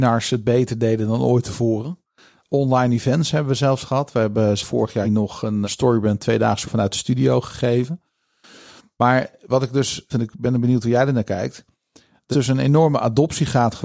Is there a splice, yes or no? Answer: yes